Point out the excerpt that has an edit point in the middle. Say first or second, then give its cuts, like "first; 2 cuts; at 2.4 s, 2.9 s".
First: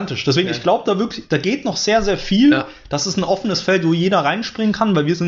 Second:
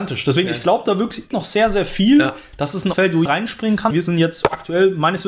second; 4 cuts; at 1.3 s, 2.9 s, 3.3 s, 3.9 s